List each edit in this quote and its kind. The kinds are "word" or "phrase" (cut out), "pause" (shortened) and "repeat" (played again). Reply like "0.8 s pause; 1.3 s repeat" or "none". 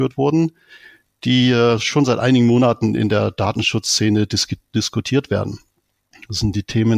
none